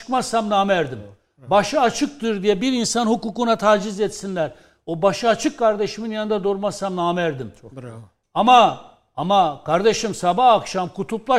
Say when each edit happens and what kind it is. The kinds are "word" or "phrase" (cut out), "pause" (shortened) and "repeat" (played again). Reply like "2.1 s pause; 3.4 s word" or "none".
none

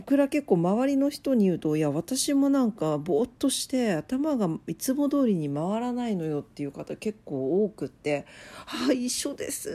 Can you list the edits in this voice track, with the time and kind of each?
none

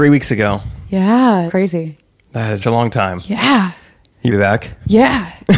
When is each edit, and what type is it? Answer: 1.5 s word; 2.6 s word; 4.3 s word

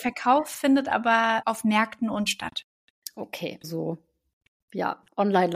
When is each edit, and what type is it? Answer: 1.4 s word; 2.3 s word; 3.6 s word

